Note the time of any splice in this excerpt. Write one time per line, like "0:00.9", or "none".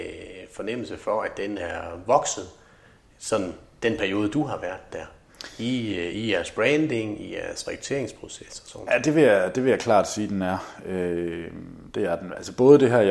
none